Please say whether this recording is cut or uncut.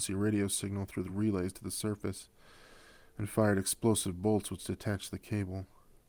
uncut